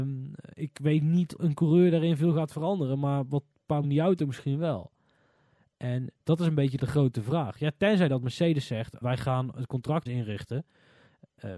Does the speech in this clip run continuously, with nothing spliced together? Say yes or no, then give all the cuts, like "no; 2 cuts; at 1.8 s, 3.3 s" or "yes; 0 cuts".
no; 5 cuts; at 1.4 s, 3.8 s, 6.8 s, 9.0 s, 10.1 s